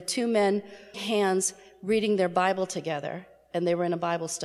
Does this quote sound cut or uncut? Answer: cut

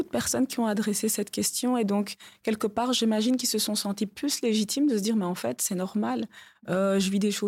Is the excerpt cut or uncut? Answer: uncut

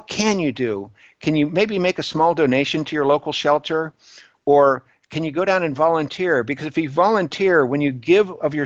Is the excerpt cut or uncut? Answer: uncut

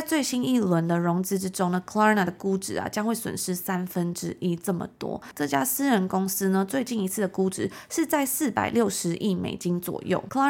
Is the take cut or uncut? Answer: uncut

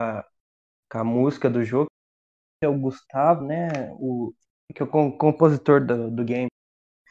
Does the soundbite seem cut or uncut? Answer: uncut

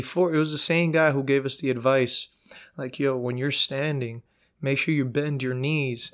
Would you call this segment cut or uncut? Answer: uncut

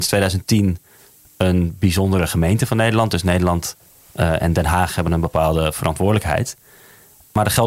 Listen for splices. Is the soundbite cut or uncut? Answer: uncut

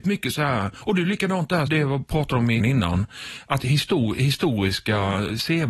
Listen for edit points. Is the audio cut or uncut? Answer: cut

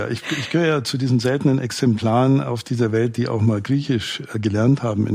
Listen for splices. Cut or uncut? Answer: uncut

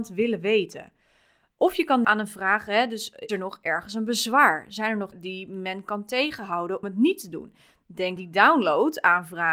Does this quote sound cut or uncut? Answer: cut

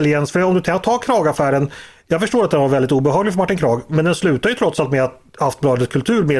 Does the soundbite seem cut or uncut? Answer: uncut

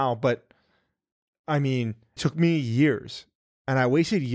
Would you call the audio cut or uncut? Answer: cut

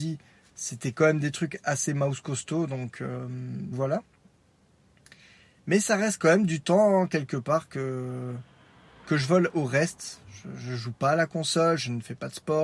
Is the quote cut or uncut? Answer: cut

